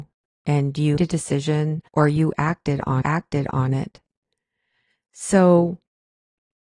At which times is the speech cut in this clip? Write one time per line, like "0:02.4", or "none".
0:01.0
0:01.9
0:03.0